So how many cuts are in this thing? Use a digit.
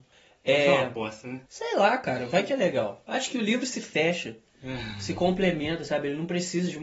1